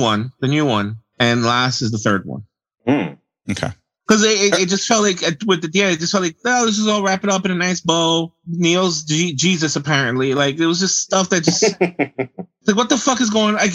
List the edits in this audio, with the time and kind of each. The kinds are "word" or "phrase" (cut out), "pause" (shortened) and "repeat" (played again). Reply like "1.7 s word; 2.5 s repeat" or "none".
none